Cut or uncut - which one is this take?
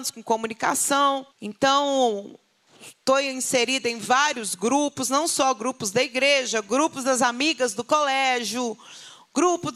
cut